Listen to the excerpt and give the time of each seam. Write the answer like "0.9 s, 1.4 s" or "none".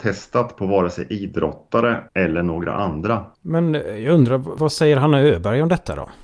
2.1 s, 3.3 s